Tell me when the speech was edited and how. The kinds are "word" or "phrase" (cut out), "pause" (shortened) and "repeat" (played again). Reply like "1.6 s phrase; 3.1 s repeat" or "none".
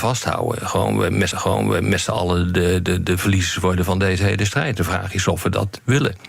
1.3 s repeat